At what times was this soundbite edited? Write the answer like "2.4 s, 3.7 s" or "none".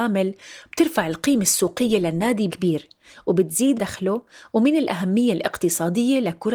2.5 s, 3.8 s